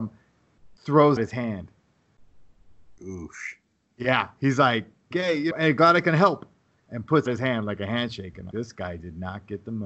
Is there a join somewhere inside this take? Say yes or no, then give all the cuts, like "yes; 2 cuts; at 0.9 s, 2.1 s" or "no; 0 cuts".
yes; 5 cuts; at 1.2 s, 5.1 s, 5.5 s, 7.3 s, 8.5 s